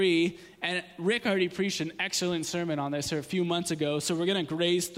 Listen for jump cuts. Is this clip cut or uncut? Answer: uncut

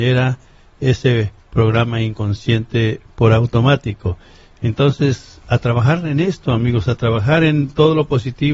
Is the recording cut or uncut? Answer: uncut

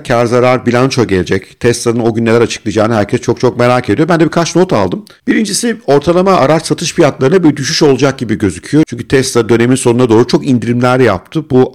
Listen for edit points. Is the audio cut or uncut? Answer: uncut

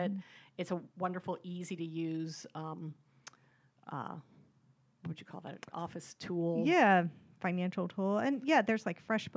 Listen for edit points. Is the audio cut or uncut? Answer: uncut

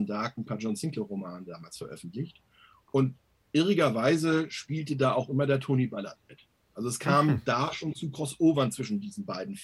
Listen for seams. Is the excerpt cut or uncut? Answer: uncut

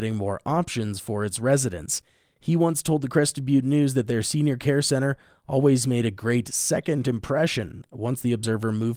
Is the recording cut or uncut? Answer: uncut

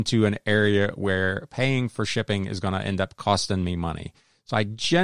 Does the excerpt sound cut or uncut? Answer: uncut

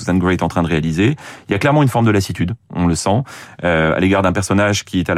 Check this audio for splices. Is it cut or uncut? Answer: uncut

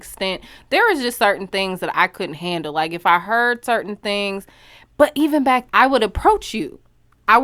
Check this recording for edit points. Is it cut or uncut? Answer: cut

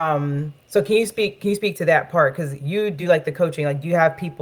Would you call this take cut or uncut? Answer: uncut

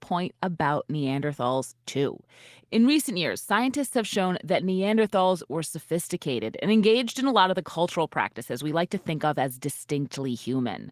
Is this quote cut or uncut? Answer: uncut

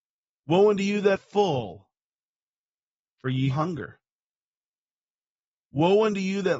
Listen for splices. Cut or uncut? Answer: cut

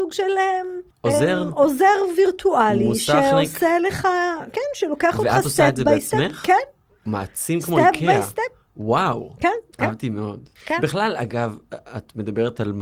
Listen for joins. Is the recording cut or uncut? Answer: cut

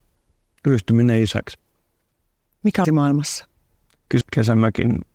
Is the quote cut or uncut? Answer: cut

